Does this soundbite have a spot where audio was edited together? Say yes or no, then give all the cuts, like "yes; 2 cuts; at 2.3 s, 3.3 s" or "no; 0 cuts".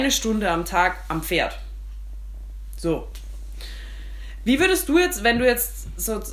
no; 0 cuts